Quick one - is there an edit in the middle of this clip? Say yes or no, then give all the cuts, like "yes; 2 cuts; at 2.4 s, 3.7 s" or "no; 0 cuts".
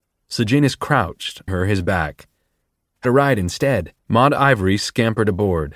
yes; 3 cuts; at 1.5 s, 3.0 s, 4.0 s